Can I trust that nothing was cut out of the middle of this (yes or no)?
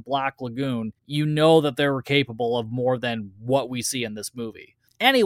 no